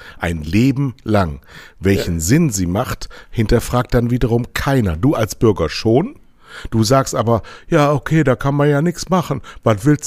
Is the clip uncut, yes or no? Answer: yes